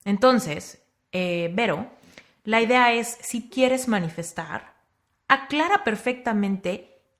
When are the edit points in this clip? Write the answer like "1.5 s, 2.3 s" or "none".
3.5 s